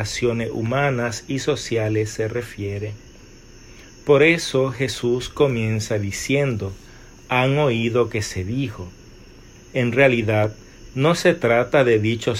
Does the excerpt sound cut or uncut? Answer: uncut